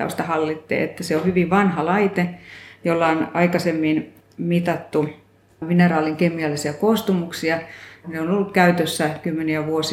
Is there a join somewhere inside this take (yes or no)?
no